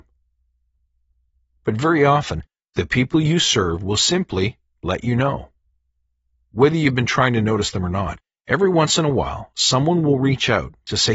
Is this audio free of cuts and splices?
yes; 0 cuts

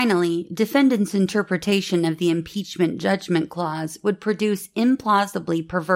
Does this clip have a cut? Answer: no; 0 cuts

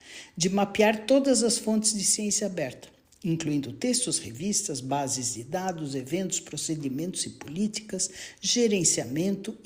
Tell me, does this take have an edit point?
no; 0 cuts

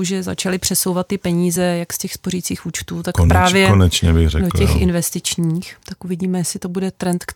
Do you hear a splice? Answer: no; 0 cuts

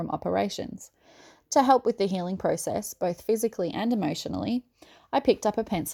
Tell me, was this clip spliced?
no; 0 cuts

